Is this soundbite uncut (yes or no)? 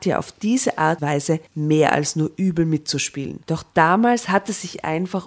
no